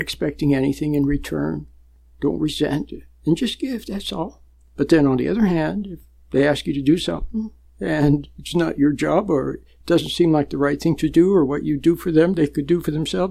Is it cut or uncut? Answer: uncut